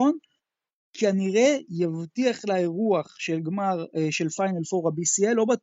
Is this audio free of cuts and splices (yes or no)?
yes